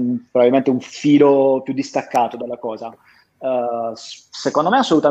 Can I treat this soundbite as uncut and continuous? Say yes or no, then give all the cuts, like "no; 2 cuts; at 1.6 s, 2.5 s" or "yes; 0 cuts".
yes; 0 cuts